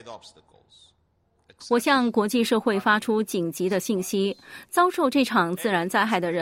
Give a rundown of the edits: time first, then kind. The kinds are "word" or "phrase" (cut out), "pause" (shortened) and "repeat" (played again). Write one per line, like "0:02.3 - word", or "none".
none